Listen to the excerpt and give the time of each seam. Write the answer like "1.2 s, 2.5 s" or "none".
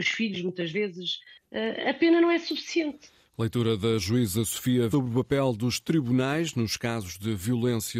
4.9 s